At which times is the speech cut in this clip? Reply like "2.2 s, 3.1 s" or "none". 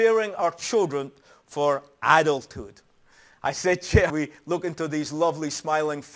4.1 s

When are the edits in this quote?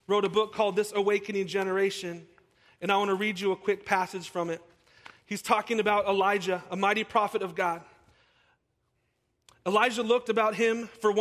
none

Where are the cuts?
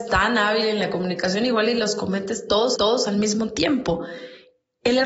2.8 s

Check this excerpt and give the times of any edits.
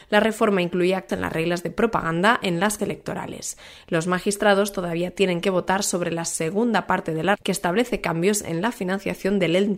1.1 s, 2.8 s, 7.4 s

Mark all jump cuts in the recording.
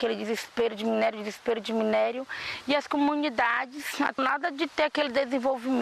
4.2 s

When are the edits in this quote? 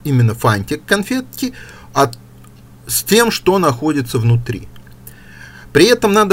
none

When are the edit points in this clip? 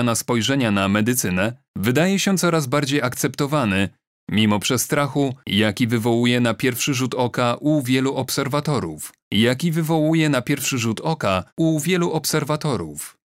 1.7 s, 9.2 s, 11.5 s

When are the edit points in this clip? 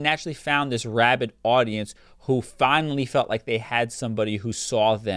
none

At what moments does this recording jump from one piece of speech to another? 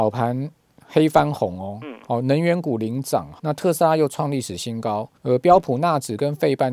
3.4 s, 5.2 s

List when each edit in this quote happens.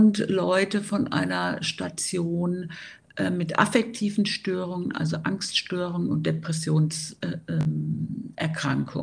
none

